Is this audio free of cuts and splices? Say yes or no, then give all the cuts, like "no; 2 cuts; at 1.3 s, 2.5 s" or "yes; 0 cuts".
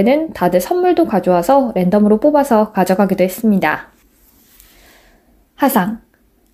yes; 0 cuts